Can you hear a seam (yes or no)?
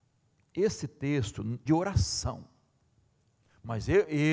yes